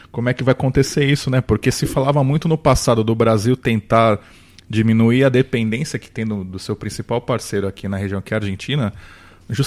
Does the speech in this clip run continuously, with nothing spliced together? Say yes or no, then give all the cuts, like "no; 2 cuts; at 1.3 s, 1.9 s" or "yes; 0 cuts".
yes; 0 cuts